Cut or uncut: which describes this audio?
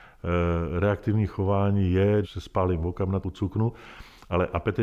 cut